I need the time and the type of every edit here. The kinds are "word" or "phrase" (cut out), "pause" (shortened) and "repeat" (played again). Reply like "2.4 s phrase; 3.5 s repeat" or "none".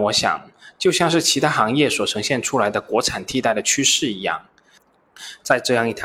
none